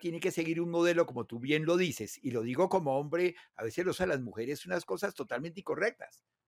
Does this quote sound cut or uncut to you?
cut